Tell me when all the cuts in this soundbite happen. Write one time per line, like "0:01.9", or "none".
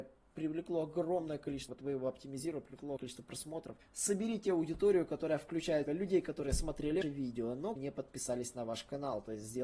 0:01.7
0:03.0
0:03.8
0:05.9
0:07.0
0:07.8